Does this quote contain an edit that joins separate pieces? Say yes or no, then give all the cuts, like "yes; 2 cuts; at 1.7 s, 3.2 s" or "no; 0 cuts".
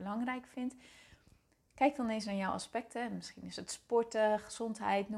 no; 0 cuts